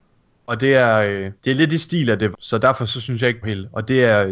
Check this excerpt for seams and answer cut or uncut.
cut